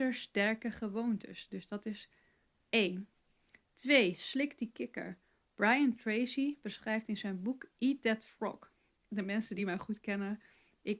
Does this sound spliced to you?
no; 0 cuts

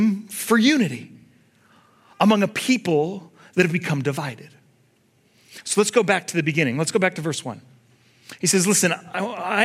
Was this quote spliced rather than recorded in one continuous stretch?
no; 0 cuts

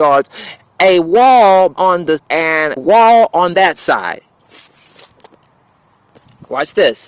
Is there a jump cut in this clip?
yes; 3 cuts; at 1.7 s, 2.2 s, 2.8 s

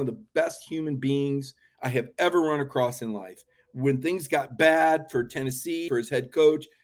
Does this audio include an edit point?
yes; 1 cut; at 5.9 s

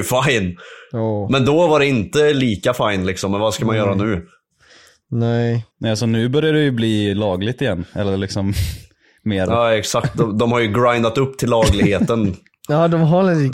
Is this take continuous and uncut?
no; 1 cut; at 5.7 s

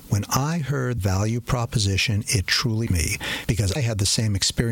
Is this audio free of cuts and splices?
no; 3 cuts; at 1.0 s, 2.9 s, 3.8 s

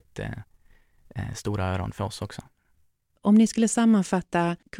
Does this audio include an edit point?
no; 0 cuts

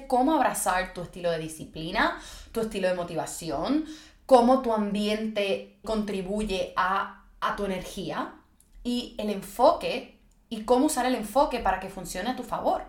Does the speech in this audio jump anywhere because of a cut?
yes; 1 cut; at 5.8 s

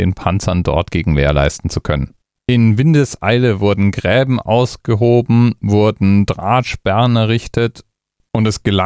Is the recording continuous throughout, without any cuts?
no; 1 cut; at 2.2 s

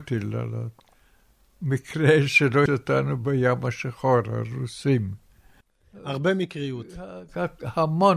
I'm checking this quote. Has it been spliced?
yes; 1 cut; at 2.7 s

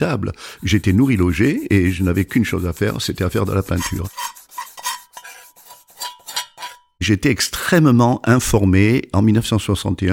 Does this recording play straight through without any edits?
yes; 0 cuts

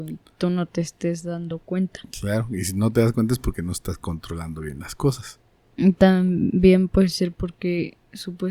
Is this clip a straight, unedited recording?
yes; 0 cuts

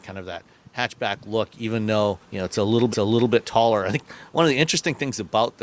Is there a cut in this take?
yes; 2 cuts; at 2.2 s, 2.9 s

